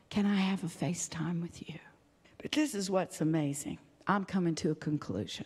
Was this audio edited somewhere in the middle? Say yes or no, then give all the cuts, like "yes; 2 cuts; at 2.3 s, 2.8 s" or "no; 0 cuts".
yes; 1 cut; at 2.2 s